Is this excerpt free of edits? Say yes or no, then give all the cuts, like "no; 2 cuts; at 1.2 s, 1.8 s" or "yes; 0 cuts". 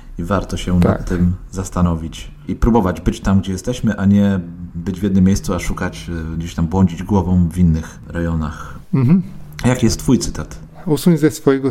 yes; 0 cuts